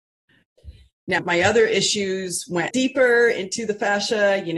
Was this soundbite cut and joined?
yes; 2 cuts; at 1.2 s, 2.7 s

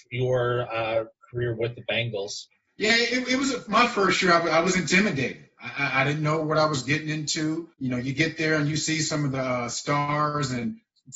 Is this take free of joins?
no; 2 cuts; at 2.7 s, 7.7 s

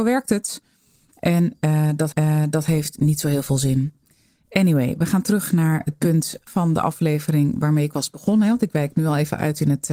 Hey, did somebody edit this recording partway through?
yes; 2 cuts; at 2.1 s, 6.5 s

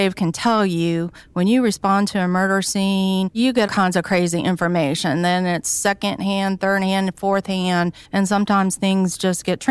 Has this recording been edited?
yes; 2 cuts; at 3.7 s, 8.0 s

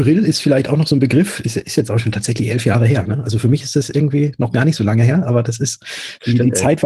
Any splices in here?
no; 0 cuts

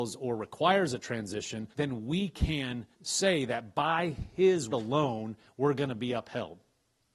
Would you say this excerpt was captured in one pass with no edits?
no; 3 cuts; at 1.7 s, 2.9 s, 4.7 s

